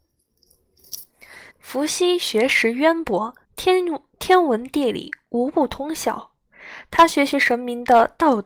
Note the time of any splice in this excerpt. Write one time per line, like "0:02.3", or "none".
0:01.5
0:03.4